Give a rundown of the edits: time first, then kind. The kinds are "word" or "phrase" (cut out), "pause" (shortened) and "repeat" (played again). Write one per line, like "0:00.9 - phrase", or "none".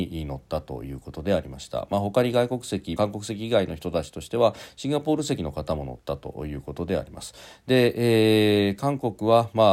0:03.0 - phrase